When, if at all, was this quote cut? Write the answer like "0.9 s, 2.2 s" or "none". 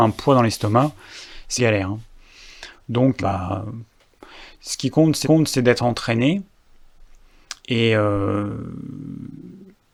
1.6 s, 3.2 s, 5.2 s, 7.6 s